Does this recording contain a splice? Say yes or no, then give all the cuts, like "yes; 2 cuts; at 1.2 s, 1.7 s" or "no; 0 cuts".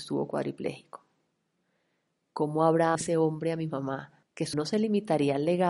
yes; 3 cuts; at 2.9 s, 4.2 s, 4.5 s